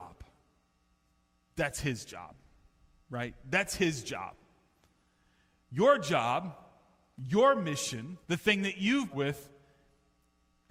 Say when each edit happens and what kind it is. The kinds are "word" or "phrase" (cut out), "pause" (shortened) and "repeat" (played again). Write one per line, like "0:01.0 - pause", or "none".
0:08.2 - pause
0:09.1 - phrase